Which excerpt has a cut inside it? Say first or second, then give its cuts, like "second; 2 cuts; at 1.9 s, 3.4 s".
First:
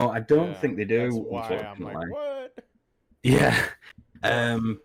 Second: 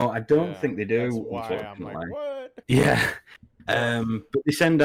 second; 1 cut; at 2.6 s